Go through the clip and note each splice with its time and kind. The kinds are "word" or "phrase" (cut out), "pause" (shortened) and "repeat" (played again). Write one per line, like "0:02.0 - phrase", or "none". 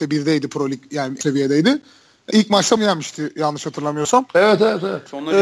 0:01.2 - word
0:02.3 - word
0:02.8 - word